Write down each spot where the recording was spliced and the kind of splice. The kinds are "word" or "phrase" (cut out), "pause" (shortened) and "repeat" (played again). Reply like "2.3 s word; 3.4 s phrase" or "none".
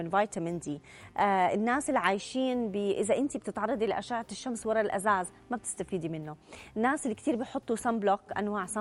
none